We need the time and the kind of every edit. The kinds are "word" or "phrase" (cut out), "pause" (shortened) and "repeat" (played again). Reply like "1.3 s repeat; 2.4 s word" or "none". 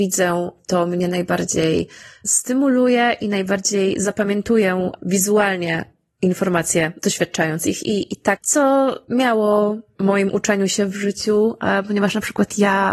8.4 s phrase; 10.0 s phrase